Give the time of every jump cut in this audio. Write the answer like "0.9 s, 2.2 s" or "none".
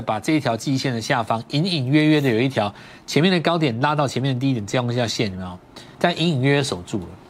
5.9 s